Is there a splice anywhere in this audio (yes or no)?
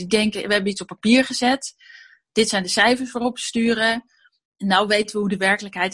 no